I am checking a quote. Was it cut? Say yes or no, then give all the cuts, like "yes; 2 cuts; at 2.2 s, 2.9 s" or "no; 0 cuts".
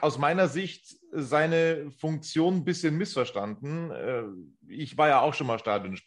no; 0 cuts